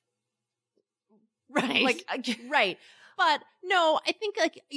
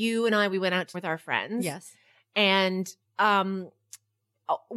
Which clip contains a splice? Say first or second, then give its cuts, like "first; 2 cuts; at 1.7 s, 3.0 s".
second; 2 cuts; at 0.9 s, 3.0 s